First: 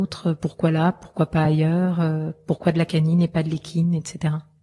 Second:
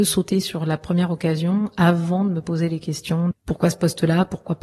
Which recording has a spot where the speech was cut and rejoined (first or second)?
second